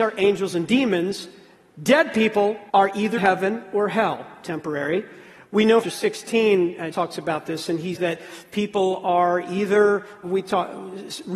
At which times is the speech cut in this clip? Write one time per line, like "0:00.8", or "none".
0:02.7
0:03.2
0:05.8
0:06.9
0:07.9
0:10.2